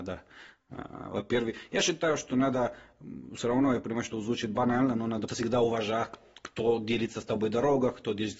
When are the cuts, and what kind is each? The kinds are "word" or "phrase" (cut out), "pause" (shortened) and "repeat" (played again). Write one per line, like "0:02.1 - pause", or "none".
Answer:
0:05.3 - word